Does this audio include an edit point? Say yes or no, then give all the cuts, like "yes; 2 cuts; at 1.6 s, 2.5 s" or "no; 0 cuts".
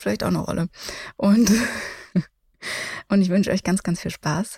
no; 0 cuts